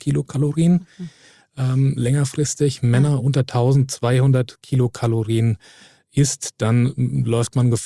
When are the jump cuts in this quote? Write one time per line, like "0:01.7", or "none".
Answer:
none